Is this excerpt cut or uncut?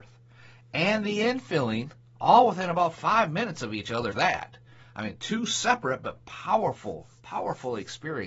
cut